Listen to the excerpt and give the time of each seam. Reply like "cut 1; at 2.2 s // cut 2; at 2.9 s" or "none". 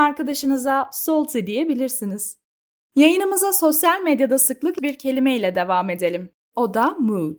cut 1; at 4.8 s